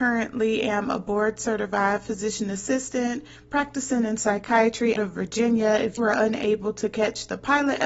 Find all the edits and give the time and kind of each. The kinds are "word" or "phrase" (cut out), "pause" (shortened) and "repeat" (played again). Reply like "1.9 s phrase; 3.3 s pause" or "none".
5.0 s word; 6.0 s word